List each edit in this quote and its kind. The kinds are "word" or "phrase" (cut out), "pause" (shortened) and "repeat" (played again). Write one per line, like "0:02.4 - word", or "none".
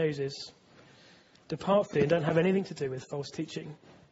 0:01.9 - word